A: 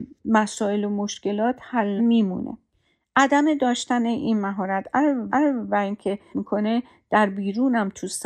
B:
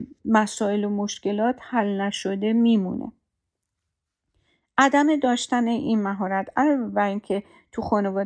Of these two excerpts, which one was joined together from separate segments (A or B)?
A